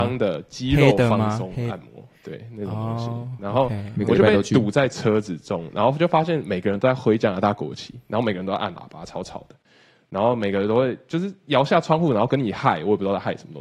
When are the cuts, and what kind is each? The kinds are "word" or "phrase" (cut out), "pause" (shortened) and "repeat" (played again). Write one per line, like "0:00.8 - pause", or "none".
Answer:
none